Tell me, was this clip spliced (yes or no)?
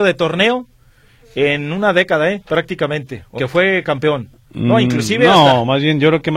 yes